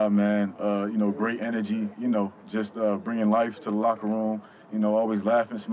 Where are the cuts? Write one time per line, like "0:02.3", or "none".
none